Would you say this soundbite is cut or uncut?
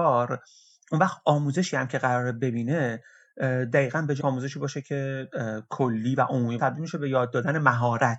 cut